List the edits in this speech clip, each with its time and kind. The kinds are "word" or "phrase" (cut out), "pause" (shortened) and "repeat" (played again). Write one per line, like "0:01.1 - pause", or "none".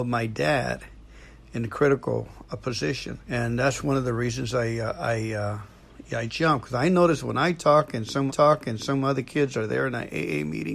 0:03.2 - pause
0:06.3 - word
0:08.3 - repeat

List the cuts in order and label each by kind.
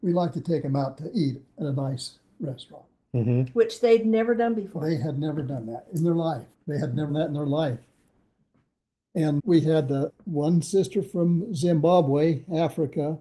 0:06.5 - pause
0:07.1 - word
0:09.4 - word
0:10.1 - word

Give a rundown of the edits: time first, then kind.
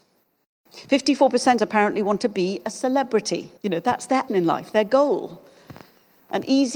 0:01.6 - phrase
0:03.6 - pause
0:04.3 - word

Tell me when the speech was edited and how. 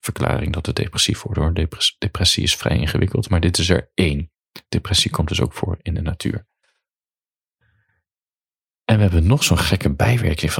none

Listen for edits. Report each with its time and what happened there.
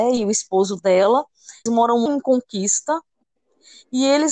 0:01.7 - word
0:02.1 - word

